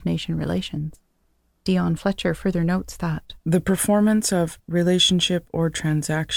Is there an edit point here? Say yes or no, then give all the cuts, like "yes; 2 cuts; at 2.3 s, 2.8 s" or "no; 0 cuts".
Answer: yes; 2 cuts; at 1.2 s, 3.4 s